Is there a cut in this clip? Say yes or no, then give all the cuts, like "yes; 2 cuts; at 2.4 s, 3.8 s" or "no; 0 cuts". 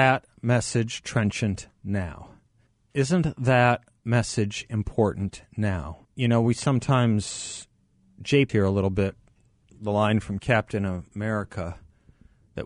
yes; 3 cuts; at 2.7 s, 6.0 s, 8.5 s